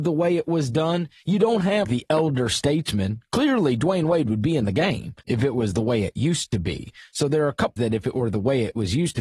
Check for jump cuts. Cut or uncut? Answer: cut